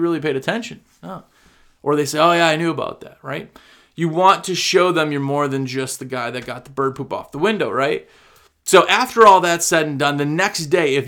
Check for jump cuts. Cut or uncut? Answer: uncut